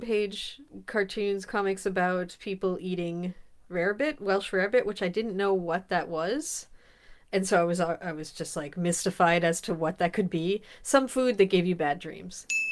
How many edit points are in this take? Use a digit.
0